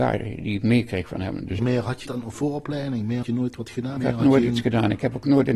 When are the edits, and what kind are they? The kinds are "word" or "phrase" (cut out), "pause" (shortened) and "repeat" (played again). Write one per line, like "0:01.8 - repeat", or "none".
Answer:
0:01.6 - word
0:02.1 - word
0:03.2 - word
0:04.0 - word